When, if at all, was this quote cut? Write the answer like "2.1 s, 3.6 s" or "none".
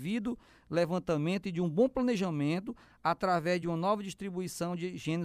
none